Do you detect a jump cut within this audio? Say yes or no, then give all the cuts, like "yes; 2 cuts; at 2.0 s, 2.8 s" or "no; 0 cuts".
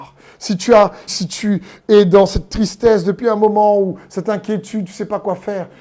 yes; 1 cut; at 1.1 s